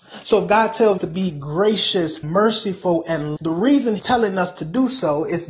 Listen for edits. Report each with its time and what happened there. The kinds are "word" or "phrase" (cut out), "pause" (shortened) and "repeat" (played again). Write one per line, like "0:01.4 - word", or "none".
0:01.0 - word
0:02.2 - word
0:03.4 - word
0:04.0 - word